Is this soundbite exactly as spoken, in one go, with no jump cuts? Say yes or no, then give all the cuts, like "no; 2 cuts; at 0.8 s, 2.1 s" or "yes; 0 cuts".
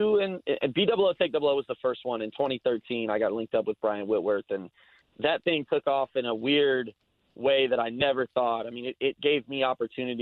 yes; 0 cuts